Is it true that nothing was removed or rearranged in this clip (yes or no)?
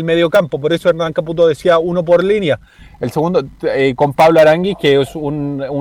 yes